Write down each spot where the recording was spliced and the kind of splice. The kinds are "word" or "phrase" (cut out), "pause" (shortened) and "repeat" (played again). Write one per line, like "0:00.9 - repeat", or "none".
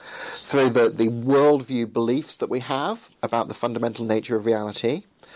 0:03.1 - pause